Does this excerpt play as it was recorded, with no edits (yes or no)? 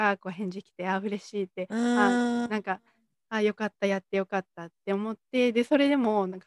yes